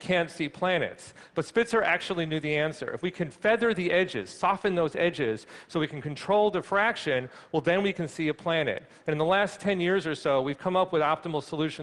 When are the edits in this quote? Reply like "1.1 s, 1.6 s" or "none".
none